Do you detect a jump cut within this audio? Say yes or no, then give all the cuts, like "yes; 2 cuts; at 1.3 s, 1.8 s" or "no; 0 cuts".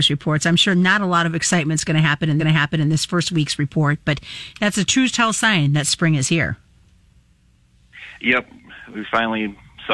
yes; 1 cut; at 2.4 s